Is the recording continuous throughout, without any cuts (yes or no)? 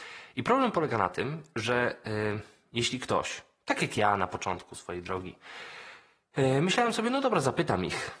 yes